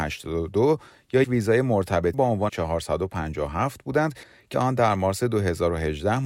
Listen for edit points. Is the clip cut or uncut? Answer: cut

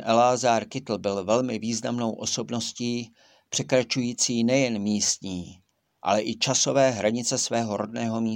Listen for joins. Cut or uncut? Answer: uncut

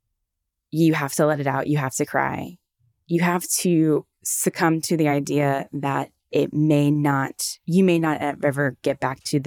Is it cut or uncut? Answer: uncut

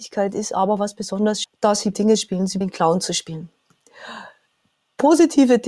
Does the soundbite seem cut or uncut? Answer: cut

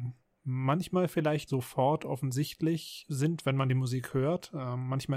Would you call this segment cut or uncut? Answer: cut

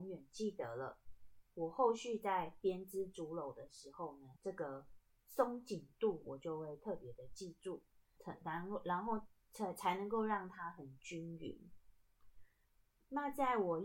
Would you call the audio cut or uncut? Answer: cut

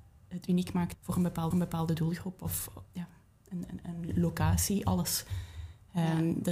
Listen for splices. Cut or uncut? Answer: cut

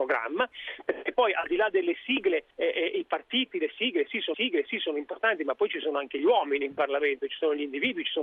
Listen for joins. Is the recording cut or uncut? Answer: cut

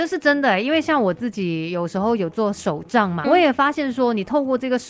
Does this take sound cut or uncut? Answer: cut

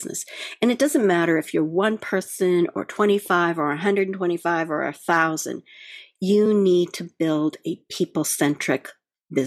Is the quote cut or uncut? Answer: uncut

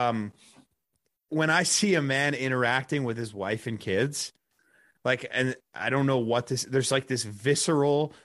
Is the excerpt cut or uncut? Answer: uncut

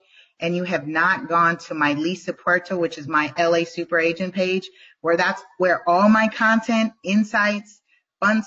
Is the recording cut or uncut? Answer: cut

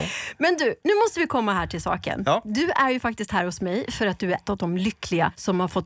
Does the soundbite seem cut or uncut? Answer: cut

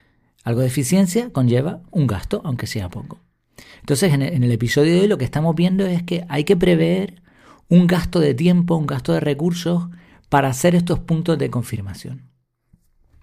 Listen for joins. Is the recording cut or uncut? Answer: uncut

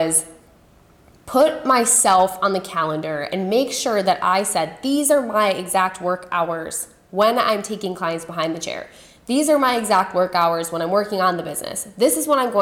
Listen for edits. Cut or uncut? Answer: uncut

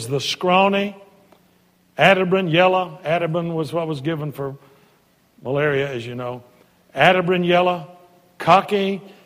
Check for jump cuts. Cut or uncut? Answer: uncut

